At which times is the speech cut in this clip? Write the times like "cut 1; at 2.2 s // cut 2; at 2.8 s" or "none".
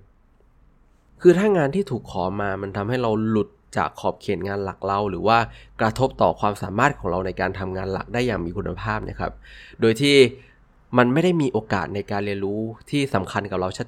none